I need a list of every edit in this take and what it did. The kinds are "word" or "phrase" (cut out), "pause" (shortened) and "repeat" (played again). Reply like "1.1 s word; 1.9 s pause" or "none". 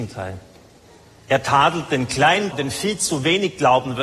2.5 s word